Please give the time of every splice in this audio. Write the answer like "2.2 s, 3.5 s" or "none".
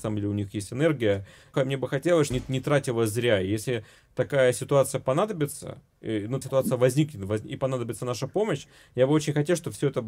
1.5 s, 2.3 s, 6.4 s